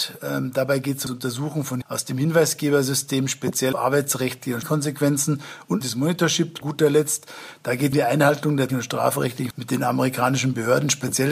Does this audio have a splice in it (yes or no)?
yes